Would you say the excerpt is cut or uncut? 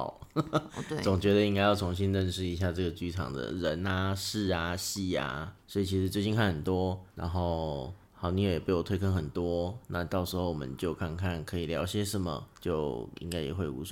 cut